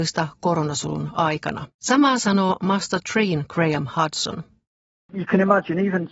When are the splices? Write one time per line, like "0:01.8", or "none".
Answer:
0:01.7